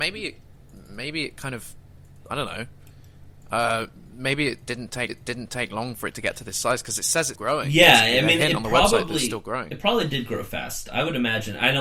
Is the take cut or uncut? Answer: cut